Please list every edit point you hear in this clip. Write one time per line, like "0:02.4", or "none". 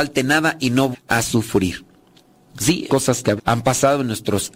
0:00.9
0:02.9
0:03.4